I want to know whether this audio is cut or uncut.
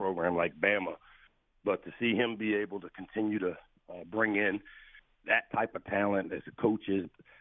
uncut